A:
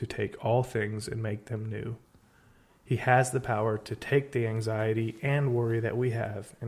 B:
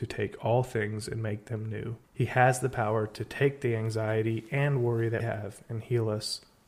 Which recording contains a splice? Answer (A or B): B